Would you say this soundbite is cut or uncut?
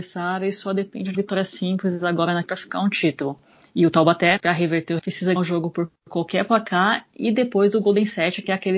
cut